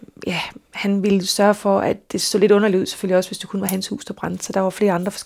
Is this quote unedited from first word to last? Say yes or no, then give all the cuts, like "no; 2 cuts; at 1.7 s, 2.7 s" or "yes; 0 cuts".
yes; 0 cuts